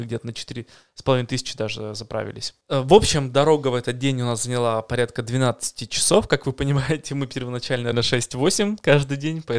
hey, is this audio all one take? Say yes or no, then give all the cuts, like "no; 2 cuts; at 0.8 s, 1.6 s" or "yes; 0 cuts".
no; 1 cut; at 7.9 s